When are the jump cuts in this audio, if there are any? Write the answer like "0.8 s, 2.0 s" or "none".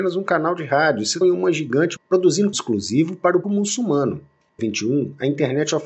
1.2 s, 2.0 s, 2.5 s, 3.4 s, 4.6 s